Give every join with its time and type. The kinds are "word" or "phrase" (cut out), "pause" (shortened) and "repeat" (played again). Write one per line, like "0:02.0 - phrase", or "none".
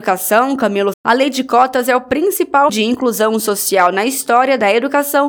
0:00.9 - word
0:02.7 - word